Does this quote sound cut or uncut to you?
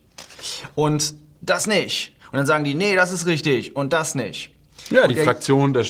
uncut